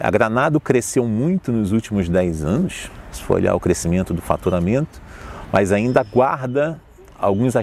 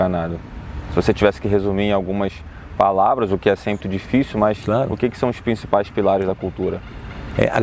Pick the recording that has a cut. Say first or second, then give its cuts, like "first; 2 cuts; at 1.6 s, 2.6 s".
second; 1 cut; at 3.8 s